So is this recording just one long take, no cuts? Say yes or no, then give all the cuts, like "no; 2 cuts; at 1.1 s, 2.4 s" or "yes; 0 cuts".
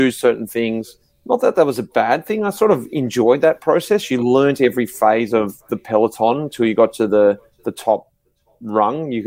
no; 1 cut; at 1.1 s